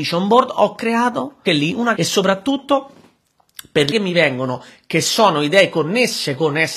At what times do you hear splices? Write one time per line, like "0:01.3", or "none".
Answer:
0:01.5
0:02.0
0:03.9